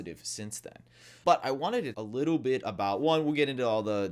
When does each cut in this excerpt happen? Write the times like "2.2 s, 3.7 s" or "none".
1.2 s, 1.9 s